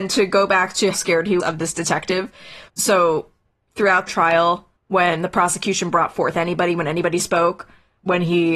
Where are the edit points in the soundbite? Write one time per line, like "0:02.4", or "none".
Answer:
0:00.9
0:01.4
0:02.7
0:04.1
0:04.8